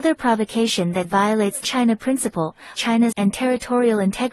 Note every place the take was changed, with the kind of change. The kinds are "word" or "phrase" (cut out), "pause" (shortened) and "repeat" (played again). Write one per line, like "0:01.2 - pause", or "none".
0:01.0 - word
0:01.6 - word
0:02.8 - word
0:03.1 - word